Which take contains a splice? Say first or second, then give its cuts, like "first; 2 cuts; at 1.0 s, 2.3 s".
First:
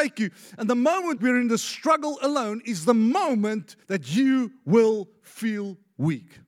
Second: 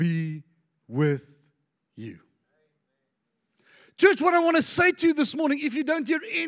first; 2 cuts; at 1.2 s, 3.8 s